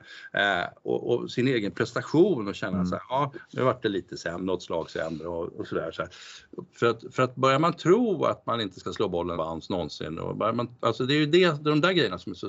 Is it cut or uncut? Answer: cut